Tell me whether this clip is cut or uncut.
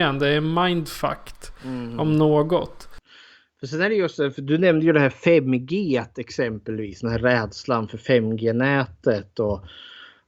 uncut